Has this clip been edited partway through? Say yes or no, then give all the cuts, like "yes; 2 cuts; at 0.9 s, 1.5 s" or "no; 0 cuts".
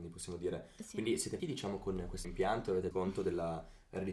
yes; 3 cuts; at 1.4 s, 2.2 s, 2.9 s